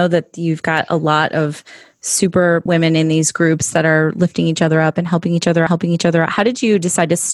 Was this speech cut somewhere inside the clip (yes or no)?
yes